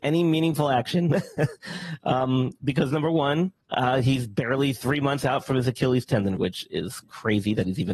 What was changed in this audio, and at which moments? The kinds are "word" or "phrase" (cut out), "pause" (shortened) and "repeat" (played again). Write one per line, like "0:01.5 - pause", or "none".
0:03.6 - pause
0:06.4 - phrase